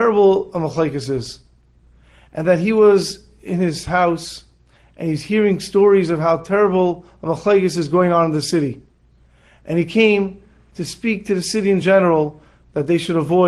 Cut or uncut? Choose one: uncut